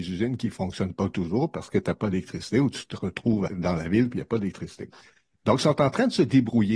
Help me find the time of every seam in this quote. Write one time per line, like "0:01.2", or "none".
0:03.5